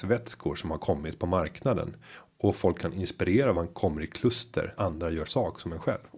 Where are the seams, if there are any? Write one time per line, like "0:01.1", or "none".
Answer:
0:03.5
0:04.7
0:05.2